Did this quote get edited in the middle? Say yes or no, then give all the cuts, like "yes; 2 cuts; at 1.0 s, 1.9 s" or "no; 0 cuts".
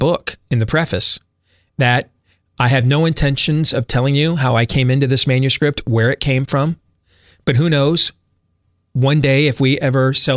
no; 0 cuts